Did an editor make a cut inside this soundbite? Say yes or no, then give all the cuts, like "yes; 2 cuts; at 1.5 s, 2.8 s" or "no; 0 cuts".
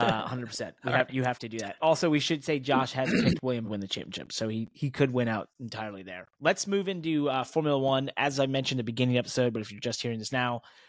yes; 3 cuts; at 3.6 s, 4.7 s, 6.3 s